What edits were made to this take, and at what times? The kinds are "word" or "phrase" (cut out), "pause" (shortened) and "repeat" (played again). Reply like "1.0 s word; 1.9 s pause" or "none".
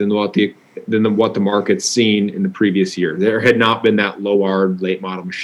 none